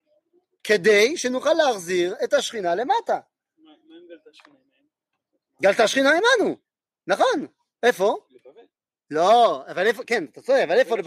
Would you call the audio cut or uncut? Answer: uncut